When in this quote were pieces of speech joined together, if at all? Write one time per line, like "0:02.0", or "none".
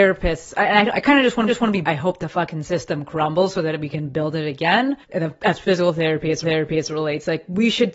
0:00.9
0:01.5
0:01.8
0:05.0
0:06.4